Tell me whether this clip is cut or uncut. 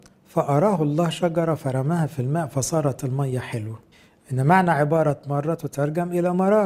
cut